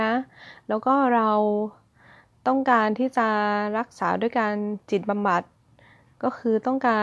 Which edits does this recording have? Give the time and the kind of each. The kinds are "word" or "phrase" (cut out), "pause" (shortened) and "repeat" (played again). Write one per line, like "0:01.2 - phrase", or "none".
none